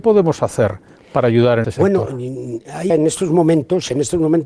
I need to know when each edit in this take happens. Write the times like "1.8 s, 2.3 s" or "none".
1.6 s, 2.9 s